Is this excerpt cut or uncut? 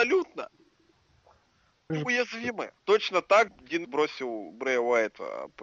cut